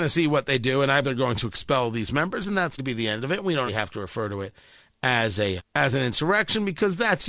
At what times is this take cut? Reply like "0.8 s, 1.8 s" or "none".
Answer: 1.0 s, 2.8 s, 3.7 s, 5.6 s